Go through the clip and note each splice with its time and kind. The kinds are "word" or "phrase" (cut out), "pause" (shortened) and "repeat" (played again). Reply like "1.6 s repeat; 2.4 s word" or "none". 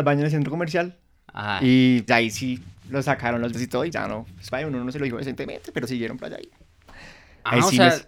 2.1 s word; 3.5 s word; 3.9 s word; 4.5 s word